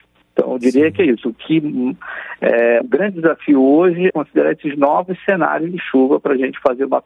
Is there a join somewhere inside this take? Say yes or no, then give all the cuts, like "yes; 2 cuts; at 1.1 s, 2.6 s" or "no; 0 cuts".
yes; 2 cuts; at 2.8 s, 4.1 s